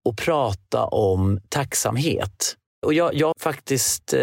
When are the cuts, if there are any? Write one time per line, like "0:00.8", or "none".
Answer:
0:02.7
0:03.3